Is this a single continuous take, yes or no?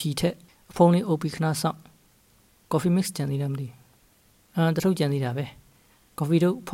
yes